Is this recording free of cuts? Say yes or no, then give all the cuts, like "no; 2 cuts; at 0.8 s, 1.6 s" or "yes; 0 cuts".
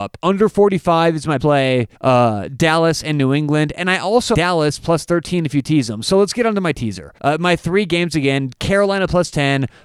no; 4 cuts; at 1.4 s, 1.9 s, 4.3 s, 7.2 s